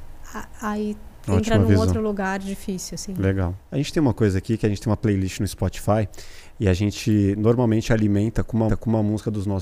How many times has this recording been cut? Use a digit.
2